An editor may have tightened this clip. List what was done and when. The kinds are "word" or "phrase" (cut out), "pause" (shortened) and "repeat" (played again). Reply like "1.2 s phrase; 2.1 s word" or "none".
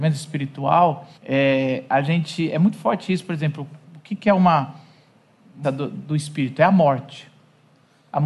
1.2 s pause; 3.8 s pause; 5.6 s word